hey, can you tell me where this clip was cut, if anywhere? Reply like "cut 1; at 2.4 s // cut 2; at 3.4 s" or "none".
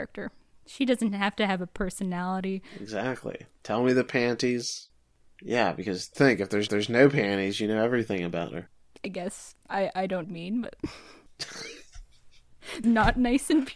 cut 1; at 6.1 s // cut 2; at 6.7 s // cut 3; at 9.6 s // cut 4; at 10.2 s // cut 5; at 12.8 s